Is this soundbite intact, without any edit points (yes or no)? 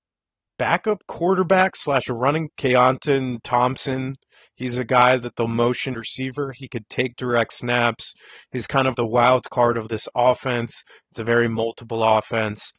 no